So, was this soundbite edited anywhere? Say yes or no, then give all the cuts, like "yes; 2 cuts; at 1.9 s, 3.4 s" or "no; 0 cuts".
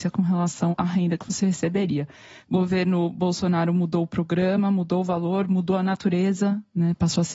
no; 0 cuts